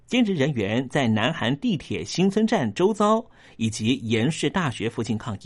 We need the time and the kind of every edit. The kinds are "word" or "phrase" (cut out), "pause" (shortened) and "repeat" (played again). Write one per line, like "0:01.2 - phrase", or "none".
none